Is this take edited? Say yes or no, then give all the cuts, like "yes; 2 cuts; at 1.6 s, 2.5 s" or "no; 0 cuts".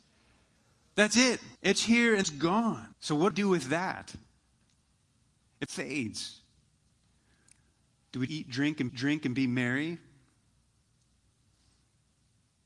yes; 7 cuts; at 1.6 s, 2.2 s, 2.9 s, 3.3 s, 5.7 s, 8.3 s, 8.9 s